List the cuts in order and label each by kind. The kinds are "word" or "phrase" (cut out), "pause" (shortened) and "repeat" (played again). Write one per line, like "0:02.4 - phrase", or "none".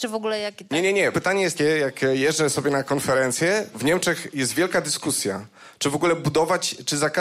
0:01.1 - word
0:01.6 - word
0:03.7 - word